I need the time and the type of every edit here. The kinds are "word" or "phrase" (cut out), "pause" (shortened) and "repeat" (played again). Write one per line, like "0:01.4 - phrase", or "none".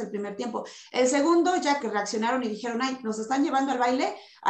0:01.8 - word

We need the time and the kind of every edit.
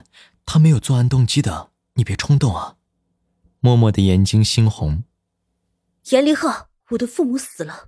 0:02.9 - pause
0:06.8 - pause

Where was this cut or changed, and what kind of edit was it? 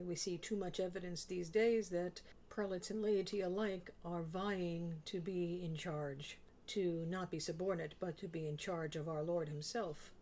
none

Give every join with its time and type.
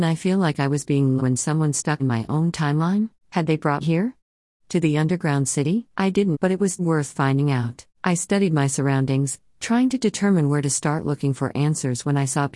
0:01.2 - word
0:02.0 - word
0:03.2 - pause
0:03.8 - word
0:05.9 - pause
0:06.3 - word
0:06.8 - word
0:07.9 - pause

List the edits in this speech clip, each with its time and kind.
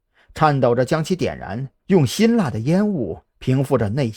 0:01.8 - pause

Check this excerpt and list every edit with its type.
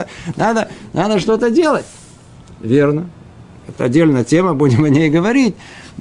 none

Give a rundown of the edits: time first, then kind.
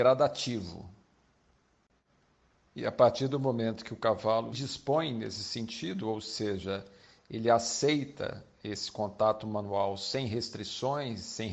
0:04.5 - word

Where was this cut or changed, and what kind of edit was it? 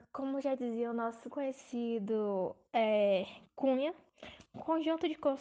0:01.3 - word

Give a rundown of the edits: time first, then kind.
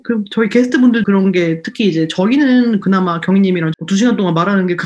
0:01.0 - word
0:03.7 - word

